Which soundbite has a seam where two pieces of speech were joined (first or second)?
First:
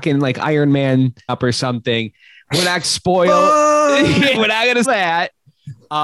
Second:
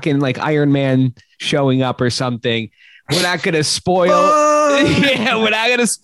first